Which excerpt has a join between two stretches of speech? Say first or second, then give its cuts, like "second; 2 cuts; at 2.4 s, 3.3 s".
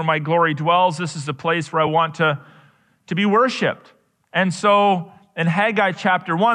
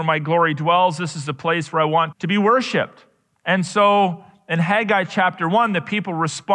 second; 1 cut; at 2.1 s